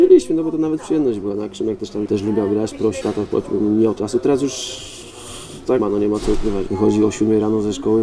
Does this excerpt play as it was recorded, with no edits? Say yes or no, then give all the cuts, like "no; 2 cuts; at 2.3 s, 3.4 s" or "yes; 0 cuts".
no; 5 cuts; at 2.1 s, 3.0 s, 4.0 s, 5.8 s, 6.7 s